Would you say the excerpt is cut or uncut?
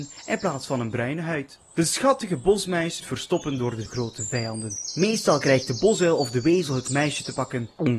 cut